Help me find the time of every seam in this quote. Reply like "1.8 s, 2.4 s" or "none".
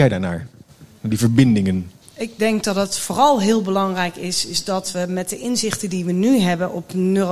none